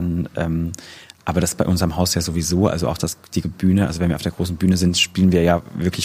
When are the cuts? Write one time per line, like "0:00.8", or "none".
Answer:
0:03.4